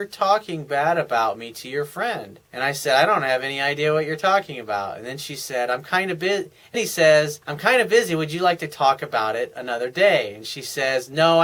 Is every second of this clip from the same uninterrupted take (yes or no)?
no